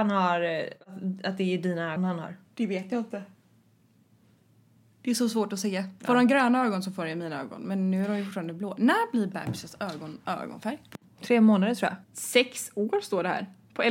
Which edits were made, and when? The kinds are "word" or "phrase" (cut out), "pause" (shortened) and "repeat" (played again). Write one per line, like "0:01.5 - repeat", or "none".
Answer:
0:02.0 - word
0:02.4 - pause
0:12.0 - pause